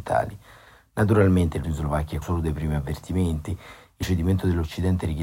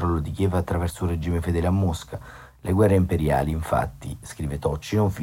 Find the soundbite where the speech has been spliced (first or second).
first